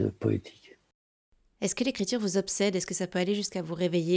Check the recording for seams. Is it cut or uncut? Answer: uncut